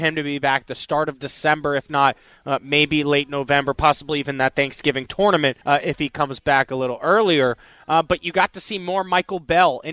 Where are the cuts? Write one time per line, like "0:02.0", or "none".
0:05.6